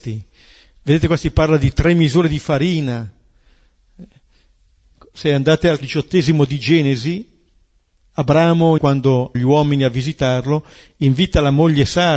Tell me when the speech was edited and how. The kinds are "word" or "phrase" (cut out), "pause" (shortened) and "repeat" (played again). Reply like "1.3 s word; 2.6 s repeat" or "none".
5.8 s word; 8.8 s word; 9.3 s word